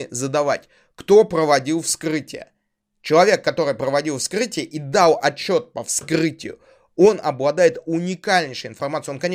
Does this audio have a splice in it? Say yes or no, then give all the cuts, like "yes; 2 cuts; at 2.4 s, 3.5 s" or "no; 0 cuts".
no; 0 cuts